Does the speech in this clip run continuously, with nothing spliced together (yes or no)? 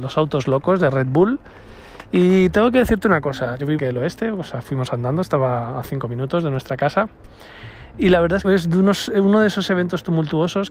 no